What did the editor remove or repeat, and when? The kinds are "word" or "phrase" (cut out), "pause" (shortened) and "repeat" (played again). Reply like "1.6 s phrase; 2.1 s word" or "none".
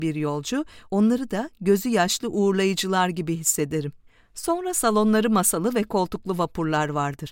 4.1 s pause